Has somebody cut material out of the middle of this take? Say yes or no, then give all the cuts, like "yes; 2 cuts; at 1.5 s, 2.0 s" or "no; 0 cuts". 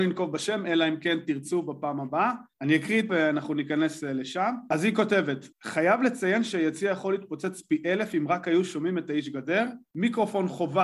yes; 2 cuts; at 3.1 s, 5.5 s